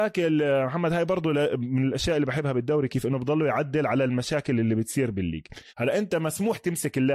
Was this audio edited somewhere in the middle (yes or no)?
yes